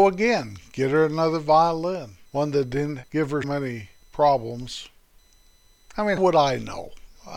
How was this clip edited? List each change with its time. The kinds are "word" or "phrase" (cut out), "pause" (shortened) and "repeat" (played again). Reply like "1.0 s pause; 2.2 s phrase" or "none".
2.3 s pause; 3.4 s word; 6.2 s word